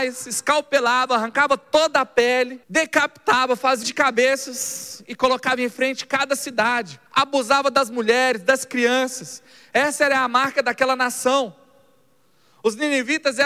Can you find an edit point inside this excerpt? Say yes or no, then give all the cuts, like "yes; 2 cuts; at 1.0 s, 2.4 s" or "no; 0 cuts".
yes; 3 cuts; at 2.6 s, 3.8 s, 7.1 s